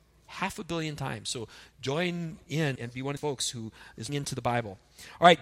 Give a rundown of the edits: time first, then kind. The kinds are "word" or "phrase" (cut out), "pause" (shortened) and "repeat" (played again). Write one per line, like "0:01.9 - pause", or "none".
0:02.8 - word
0:03.2 - word
0:04.1 - word